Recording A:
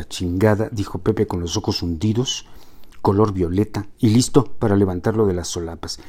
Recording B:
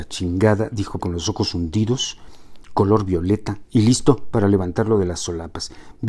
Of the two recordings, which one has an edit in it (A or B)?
B